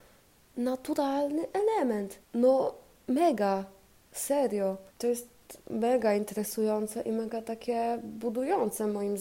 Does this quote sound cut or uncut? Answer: cut